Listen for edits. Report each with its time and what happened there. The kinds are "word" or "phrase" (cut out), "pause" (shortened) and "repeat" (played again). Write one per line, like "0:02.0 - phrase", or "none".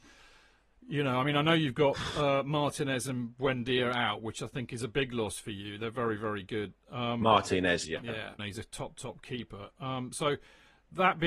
0:07.8 - word
0:08.4 - word